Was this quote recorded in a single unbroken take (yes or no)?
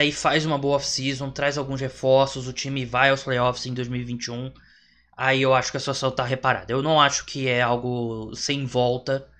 yes